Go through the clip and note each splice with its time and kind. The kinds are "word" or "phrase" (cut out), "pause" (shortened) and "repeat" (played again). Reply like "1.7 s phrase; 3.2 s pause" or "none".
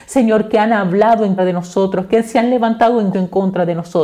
1.4 s word; 3.1 s word

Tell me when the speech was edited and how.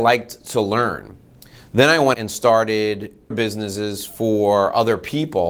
2.1 s word; 3.3 s word

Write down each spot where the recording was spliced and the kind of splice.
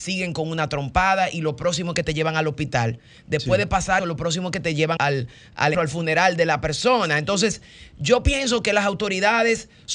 4.0 s word; 5.0 s word; 5.7 s word

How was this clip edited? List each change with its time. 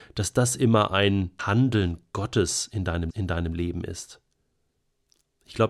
1.4 s word; 3.1 s repeat

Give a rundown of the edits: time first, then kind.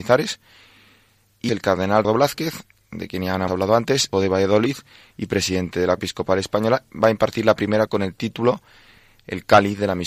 1.5 s word; 2.0 s word; 3.5 s word; 4.1 s word; 6.0 s word; 7.9 s word

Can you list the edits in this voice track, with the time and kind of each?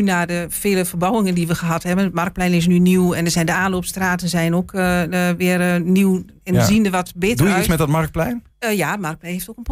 8.5 s pause

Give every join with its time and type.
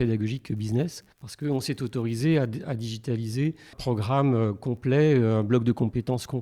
1.1 s pause; 3.7 s word

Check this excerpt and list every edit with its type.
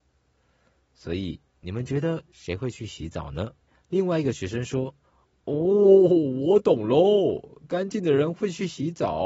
3.7 s pause; 5.0 s pause

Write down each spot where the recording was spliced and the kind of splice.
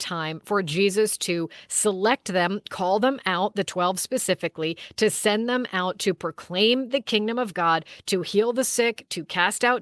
none

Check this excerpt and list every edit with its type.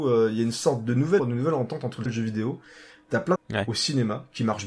1.2 s word; 2.1 s word; 3.4 s word

